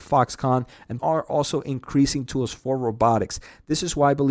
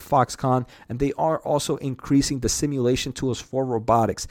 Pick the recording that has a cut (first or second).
first